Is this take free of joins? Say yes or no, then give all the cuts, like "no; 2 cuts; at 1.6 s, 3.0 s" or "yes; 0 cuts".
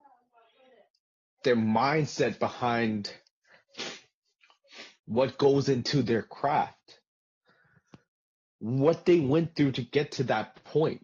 no; 1 cut; at 5.0 s